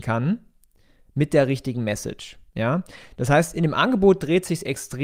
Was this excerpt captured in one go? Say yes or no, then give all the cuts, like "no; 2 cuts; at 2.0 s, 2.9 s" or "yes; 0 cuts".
no; 1 cut; at 2.5 s